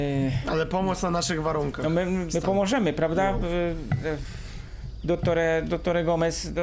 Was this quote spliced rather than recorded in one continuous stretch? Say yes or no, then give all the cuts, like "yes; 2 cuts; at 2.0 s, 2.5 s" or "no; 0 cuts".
yes; 1 cut; at 2.3 s